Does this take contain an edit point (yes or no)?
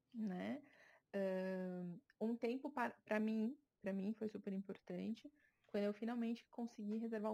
no